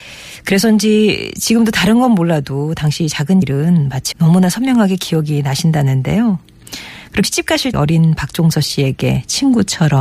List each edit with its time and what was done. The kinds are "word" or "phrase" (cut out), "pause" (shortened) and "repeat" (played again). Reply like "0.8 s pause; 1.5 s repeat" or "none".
3.4 s word; 4.1 s phrase; 7.2 s word; 7.7 s word